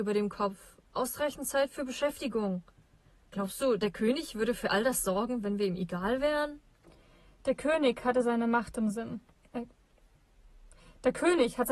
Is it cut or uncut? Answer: uncut